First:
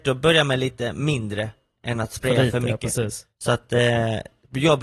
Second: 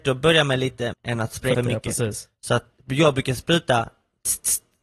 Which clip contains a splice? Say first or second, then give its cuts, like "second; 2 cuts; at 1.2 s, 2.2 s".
second; 3 cuts; at 0.9 s, 1.5 s, 2.7 s